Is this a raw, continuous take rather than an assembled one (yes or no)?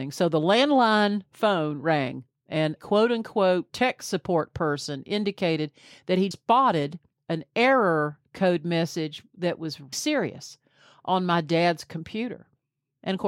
no